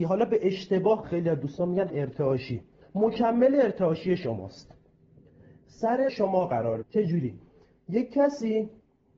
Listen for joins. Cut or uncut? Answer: cut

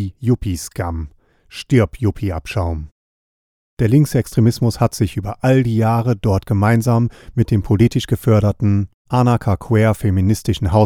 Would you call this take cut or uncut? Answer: uncut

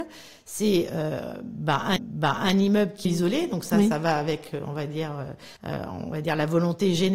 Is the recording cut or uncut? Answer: cut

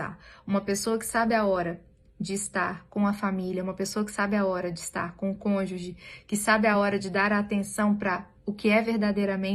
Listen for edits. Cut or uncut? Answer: uncut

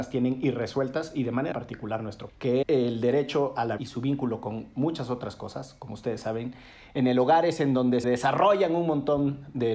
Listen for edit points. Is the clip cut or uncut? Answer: cut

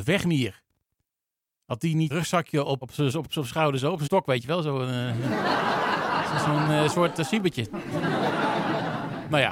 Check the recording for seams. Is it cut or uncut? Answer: cut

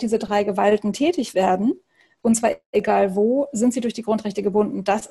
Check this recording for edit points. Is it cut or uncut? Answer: uncut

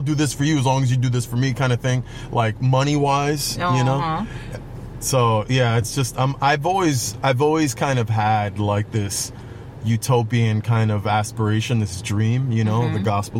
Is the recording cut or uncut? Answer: uncut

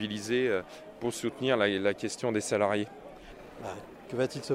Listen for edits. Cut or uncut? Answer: uncut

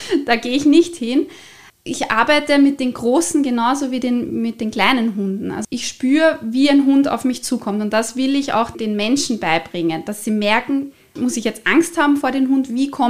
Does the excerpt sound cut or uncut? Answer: uncut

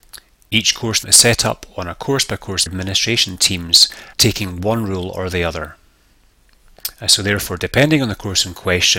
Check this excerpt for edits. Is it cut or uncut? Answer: cut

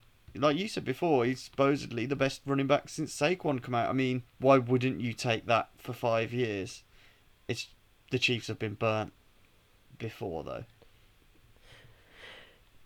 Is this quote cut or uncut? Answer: cut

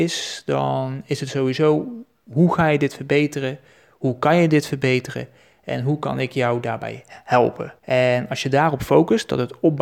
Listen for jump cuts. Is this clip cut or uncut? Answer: cut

